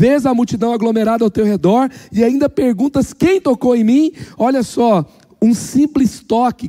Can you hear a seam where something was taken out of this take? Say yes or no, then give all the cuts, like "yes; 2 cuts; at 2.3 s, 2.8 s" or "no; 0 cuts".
no; 0 cuts